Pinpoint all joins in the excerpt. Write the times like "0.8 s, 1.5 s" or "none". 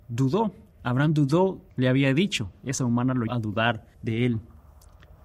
1.7 s, 2.8 s, 3.3 s, 3.9 s